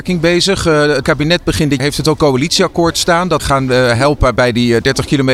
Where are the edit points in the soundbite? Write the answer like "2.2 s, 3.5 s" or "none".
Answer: 1.0 s, 1.8 s, 2.2 s, 3.4 s